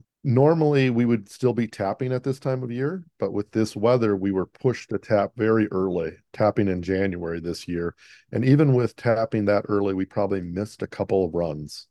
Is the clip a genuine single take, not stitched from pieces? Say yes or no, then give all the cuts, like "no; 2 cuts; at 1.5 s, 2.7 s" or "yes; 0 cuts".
yes; 0 cuts